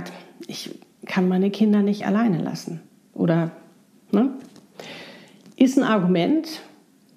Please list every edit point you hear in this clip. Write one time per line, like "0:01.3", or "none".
none